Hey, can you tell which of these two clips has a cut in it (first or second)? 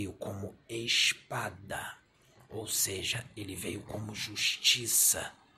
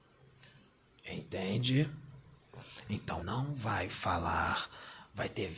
second